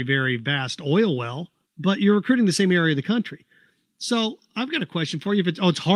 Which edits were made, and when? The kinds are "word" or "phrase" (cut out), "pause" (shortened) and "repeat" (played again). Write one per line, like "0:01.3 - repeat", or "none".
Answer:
none